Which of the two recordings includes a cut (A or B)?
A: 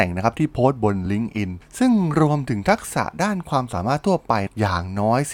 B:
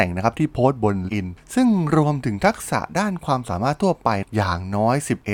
B